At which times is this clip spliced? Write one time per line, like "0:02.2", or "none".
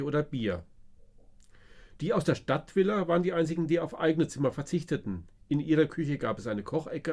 none